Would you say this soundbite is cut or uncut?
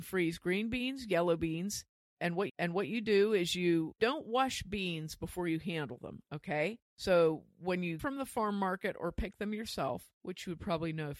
cut